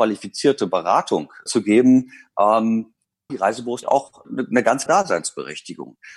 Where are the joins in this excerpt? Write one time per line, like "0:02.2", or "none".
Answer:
0:01.5
0:03.3
0:03.8
0:04.2
0:04.9